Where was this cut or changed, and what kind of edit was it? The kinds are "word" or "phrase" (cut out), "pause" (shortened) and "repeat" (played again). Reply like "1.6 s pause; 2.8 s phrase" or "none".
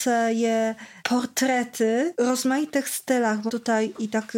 2.1 s word; 3.5 s word